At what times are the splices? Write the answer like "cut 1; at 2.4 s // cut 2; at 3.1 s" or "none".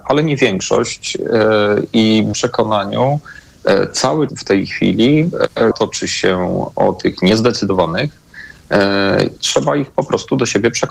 cut 1; at 2.3 s // cut 2; at 4.3 s // cut 3; at 5.7 s // cut 4; at 9.4 s